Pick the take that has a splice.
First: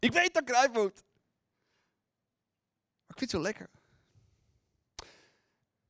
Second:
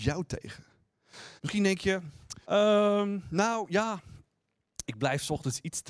second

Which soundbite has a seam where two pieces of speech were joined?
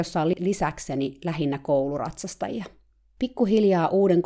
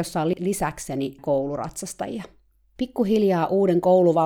second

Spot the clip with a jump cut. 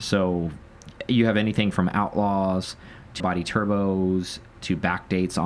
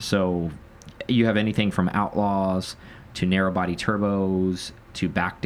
first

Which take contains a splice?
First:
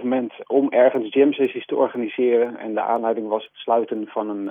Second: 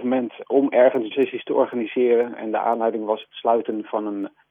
second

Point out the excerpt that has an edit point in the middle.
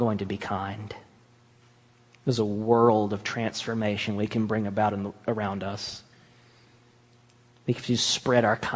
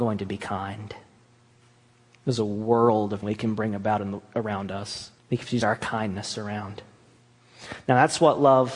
second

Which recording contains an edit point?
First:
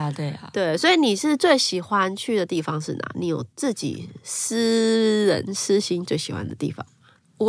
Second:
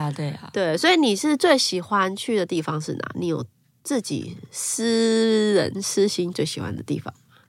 first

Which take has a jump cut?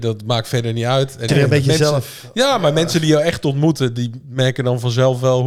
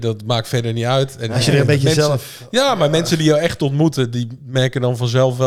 first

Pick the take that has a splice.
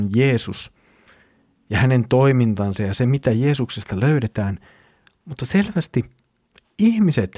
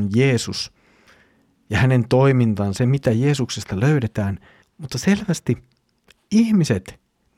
second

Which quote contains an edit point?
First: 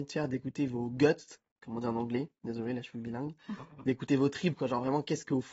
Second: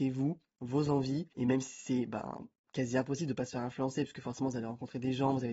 second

